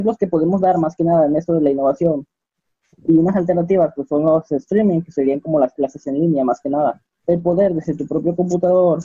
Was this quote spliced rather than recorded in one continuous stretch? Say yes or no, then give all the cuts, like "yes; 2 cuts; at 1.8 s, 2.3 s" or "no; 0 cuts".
no; 0 cuts